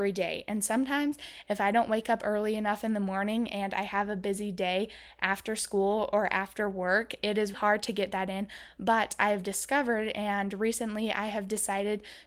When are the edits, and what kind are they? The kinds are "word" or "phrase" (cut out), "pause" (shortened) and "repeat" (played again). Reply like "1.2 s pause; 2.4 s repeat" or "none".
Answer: 7.5 s word

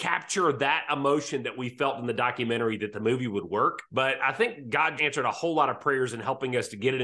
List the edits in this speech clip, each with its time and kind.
3.9 s pause; 5.0 s word

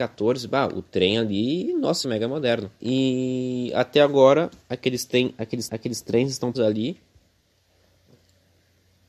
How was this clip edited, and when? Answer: 2.0 s phrase; 2.8 s pause; 5.7 s repeat; 6.5 s word

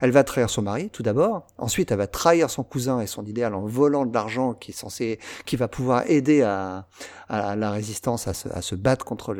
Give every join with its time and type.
none

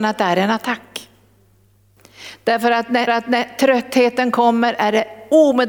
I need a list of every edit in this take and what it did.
3.1 s repeat

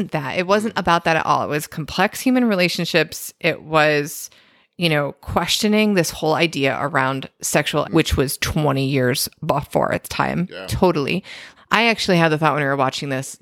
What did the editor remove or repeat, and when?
7.8 s word; 11.6 s word

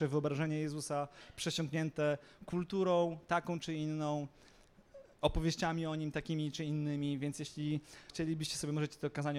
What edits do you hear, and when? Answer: 8.1 s word

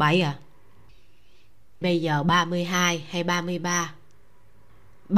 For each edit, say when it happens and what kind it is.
1.8 s word

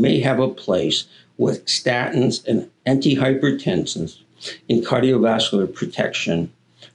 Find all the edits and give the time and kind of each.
none

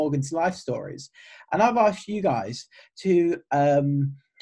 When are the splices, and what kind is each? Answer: none

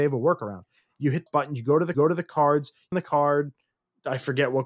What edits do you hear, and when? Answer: 1.3 s phrase; 1.9 s repeat; 2.9 s phrase

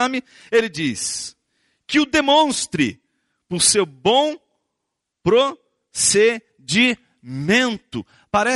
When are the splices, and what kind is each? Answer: none

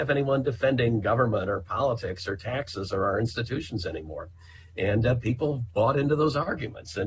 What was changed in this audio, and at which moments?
none

